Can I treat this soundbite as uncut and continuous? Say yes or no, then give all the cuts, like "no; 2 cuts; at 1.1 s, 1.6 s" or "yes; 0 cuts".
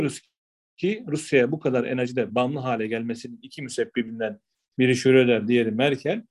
yes; 0 cuts